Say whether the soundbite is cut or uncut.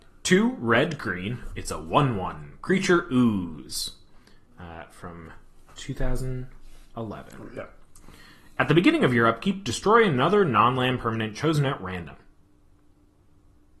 uncut